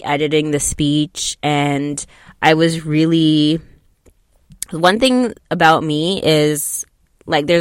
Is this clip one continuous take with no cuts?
yes; 0 cuts

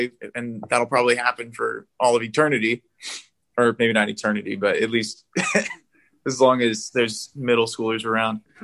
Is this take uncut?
yes; 0 cuts

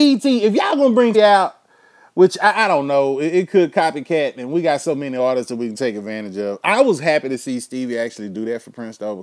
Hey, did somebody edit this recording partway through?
yes; 1 cut; at 1.1 s

